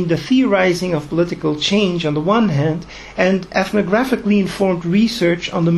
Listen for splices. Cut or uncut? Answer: uncut